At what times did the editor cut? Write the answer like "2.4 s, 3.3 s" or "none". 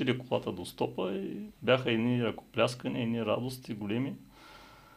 1.6 s